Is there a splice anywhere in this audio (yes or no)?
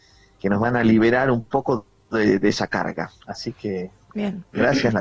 yes